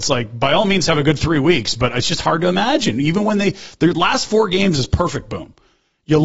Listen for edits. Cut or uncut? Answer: uncut